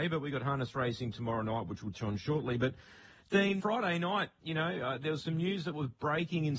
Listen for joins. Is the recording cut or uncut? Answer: cut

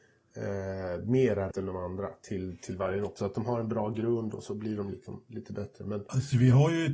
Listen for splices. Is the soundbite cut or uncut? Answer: cut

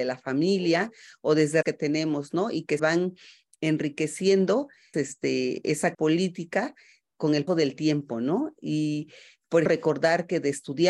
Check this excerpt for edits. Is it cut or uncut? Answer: cut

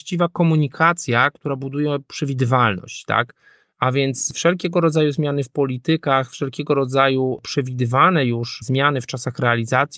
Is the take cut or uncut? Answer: uncut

